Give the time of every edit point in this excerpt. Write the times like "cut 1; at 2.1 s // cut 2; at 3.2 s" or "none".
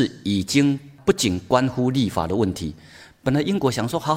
none